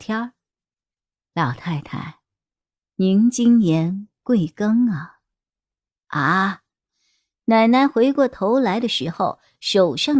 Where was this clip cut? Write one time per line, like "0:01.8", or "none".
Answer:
none